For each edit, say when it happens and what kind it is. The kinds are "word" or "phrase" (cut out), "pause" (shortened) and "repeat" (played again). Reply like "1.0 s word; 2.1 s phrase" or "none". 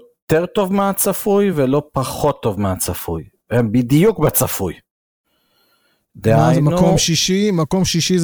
none